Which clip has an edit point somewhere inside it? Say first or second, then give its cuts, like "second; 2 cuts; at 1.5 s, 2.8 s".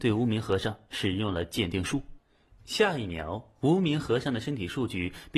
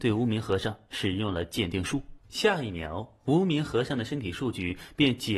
second; 1 cut; at 2.2 s